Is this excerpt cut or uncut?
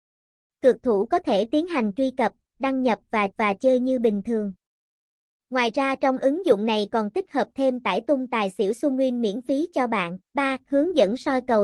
cut